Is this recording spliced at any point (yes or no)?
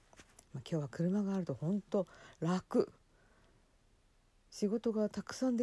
no